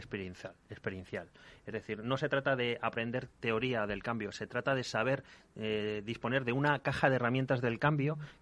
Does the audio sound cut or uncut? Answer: uncut